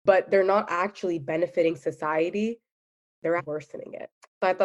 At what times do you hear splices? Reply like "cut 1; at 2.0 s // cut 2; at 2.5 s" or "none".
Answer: cut 1; at 3.4 s